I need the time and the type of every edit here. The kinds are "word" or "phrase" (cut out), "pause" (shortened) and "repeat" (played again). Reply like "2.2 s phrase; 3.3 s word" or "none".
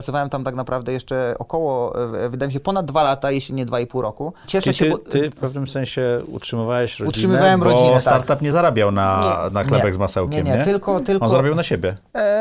none